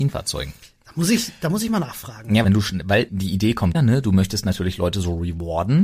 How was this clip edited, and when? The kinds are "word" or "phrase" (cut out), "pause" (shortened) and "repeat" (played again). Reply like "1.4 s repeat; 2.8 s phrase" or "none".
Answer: 2.4 s phrase; 3.1 s word; 3.7 s word